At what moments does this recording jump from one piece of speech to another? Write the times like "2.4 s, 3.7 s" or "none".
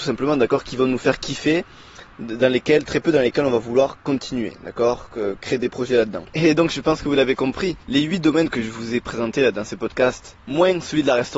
6.3 s, 7.8 s, 10.4 s